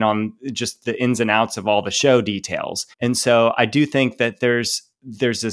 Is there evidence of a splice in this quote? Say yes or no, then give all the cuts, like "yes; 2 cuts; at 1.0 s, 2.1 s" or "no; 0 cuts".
yes; 1 cut; at 2.9 s